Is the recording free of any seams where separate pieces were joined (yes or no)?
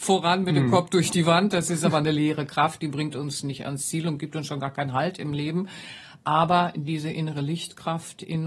yes